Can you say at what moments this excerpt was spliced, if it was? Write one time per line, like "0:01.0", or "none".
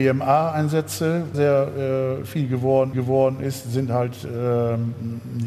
0:01.3
0:02.9